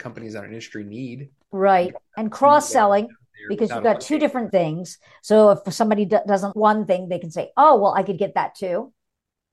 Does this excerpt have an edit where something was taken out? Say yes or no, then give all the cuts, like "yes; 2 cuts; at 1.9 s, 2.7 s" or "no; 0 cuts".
yes; 3 cuts; at 1.4 s, 4.5 s, 6.5 s